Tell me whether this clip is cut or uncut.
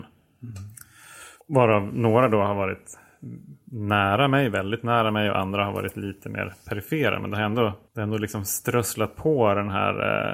cut